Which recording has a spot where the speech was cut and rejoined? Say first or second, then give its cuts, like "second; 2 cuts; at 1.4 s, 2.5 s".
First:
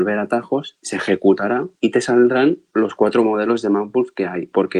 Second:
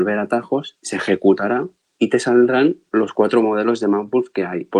first; 1 cut; at 1.8 s